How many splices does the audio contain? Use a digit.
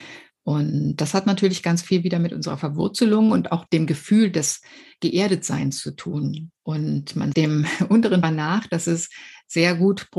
4